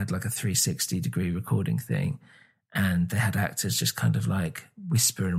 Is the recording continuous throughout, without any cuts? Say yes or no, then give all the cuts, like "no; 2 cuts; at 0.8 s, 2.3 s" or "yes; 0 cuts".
yes; 0 cuts